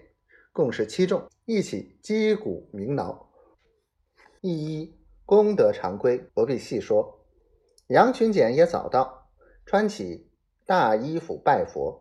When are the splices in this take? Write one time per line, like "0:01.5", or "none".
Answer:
0:01.3
0:04.4
0:06.3